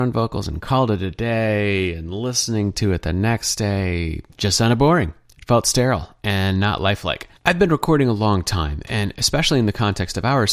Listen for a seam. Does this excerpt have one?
yes; 2 cuts; at 4.3 s, 7.4 s

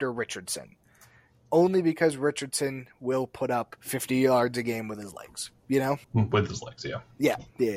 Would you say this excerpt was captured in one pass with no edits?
no; 2 cuts; at 3.8 s, 6.0 s

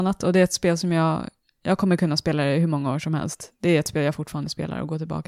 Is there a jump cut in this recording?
no; 0 cuts

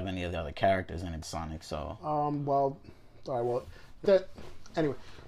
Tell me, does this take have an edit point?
yes; 2 cuts; at 1.2 s, 4.1 s

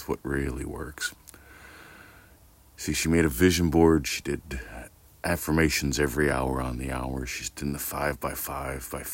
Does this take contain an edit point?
no; 0 cuts

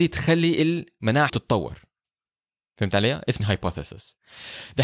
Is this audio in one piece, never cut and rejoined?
no; 2 cuts; at 1.3 s, 3.4 s

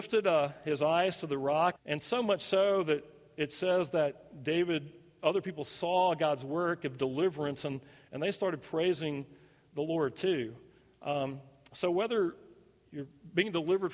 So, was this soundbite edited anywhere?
yes; 1 cut; at 1.8 s

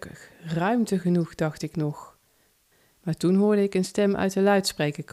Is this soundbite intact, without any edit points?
yes; 0 cuts

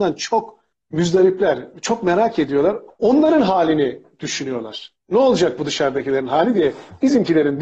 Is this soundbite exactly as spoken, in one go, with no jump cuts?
no; 1 cut; at 2.9 s

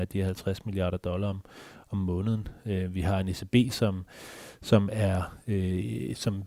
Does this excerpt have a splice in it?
no; 0 cuts

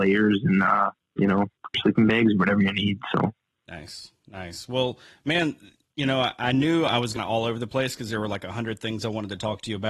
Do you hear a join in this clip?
yes; 2 cuts; at 1.7 s, 7.2 s

